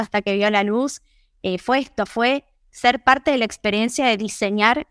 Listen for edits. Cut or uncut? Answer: uncut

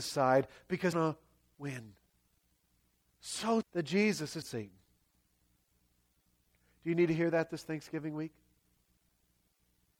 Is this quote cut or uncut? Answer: cut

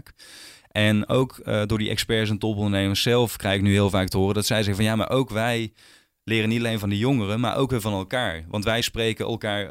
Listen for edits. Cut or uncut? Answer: uncut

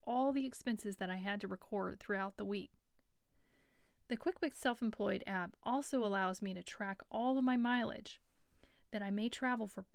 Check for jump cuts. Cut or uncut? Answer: uncut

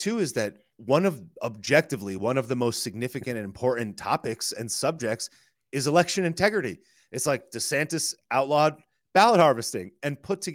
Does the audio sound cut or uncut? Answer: uncut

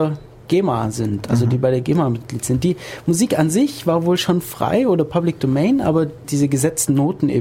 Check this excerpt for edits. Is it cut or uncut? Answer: cut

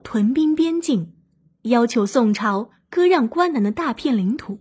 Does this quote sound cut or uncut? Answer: uncut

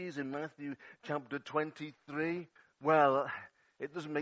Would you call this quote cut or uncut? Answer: cut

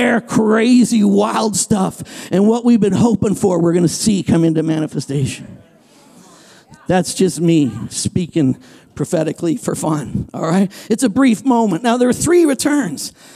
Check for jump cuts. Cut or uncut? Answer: uncut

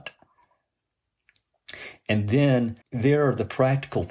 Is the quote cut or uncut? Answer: cut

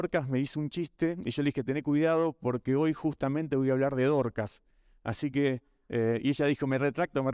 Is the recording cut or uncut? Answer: uncut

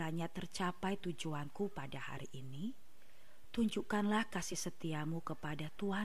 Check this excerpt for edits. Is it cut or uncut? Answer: uncut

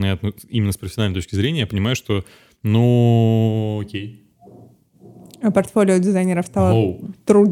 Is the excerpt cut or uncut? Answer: uncut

